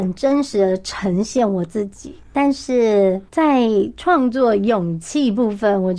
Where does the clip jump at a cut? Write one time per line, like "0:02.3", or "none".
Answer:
0:03.3